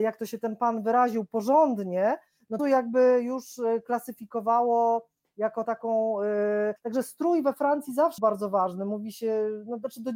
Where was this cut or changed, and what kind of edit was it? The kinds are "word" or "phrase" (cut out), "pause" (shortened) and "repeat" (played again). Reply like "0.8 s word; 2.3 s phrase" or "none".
2.6 s phrase; 5.6 s word; 6.8 s pause; 8.2 s word

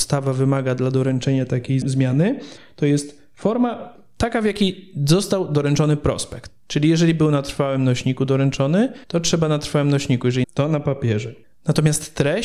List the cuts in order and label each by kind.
1.8 s word; 9.0 s pause; 10.4 s phrase

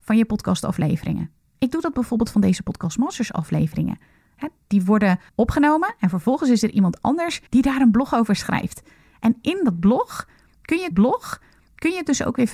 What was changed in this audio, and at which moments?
5.3 s pause; 7.5 s pause; 10.9 s repeat

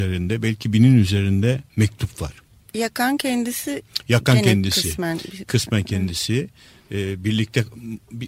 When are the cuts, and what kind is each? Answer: none

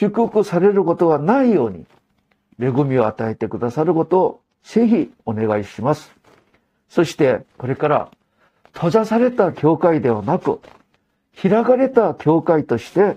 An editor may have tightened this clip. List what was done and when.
5.2 s pause

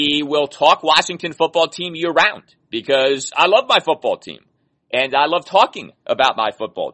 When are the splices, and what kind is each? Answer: none

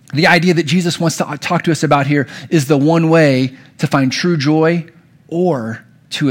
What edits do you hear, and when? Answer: none

